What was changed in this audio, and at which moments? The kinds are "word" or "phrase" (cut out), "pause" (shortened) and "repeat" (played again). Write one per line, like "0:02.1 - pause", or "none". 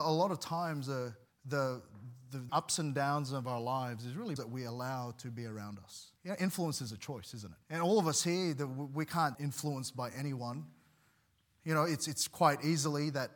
0:01.3 - pause
0:02.5 - word
0:04.4 - phrase
0:06.2 - pause
0:07.6 - pause
0:09.3 - phrase